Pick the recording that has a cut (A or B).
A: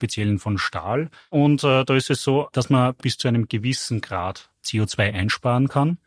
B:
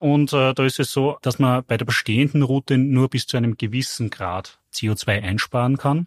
A